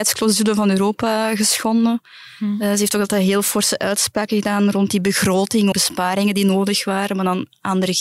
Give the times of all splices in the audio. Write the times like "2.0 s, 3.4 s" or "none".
5.7 s

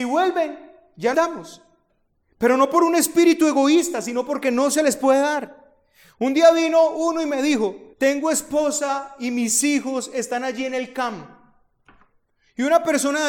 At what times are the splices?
1.1 s, 7.9 s

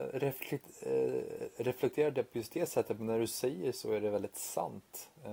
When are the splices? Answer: none

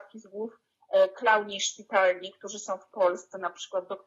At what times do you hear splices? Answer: none

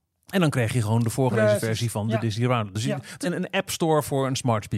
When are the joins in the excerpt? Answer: 3.2 s

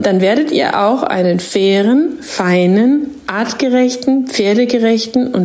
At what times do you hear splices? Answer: none

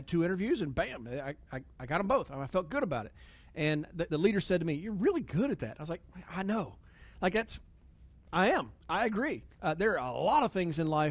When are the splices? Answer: 4.1 s, 8.8 s, 9.5 s

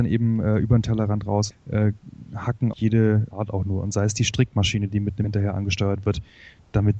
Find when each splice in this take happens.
1.5 s, 2.7 s, 3.3 s, 5.2 s

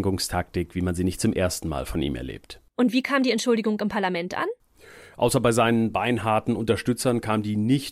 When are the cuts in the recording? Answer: none

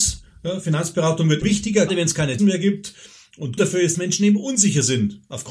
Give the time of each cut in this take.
1.4 s, 1.9 s, 2.4 s, 3.6 s, 3.9 s

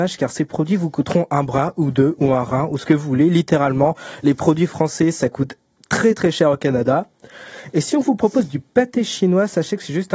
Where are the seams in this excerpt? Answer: none

